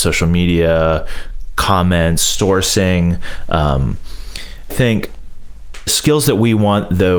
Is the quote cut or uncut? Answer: cut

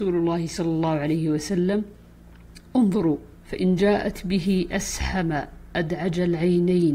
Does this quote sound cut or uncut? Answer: uncut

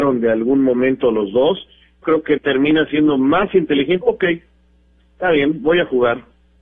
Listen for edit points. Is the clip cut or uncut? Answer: cut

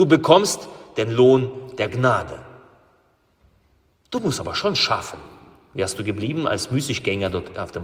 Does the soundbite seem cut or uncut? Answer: uncut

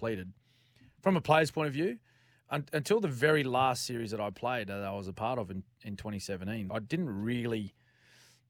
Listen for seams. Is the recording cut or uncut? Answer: cut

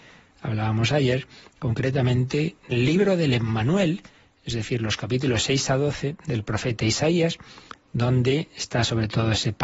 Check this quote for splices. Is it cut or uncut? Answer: cut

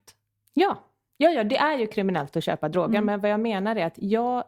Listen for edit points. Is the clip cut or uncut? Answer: uncut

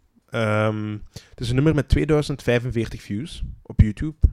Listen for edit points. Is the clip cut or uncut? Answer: uncut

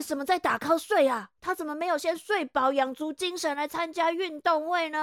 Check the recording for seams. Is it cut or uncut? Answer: cut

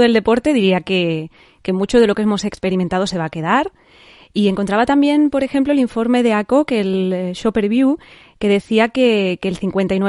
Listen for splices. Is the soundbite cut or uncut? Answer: uncut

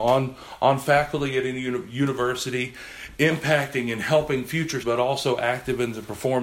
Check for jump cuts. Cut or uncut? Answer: cut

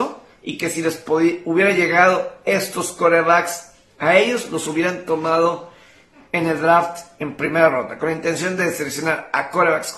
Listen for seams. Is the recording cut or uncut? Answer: uncut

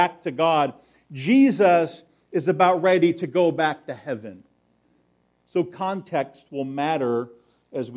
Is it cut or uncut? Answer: uncut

